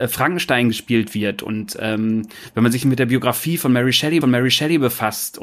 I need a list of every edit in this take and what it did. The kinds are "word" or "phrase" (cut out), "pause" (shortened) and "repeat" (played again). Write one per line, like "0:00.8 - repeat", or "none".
0:04.2 - repeat